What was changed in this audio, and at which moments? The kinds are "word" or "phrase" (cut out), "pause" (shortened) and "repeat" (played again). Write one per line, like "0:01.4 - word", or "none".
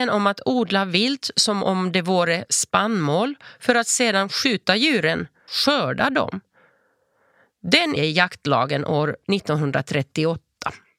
0:05.5 - word
0:08.0 - phrase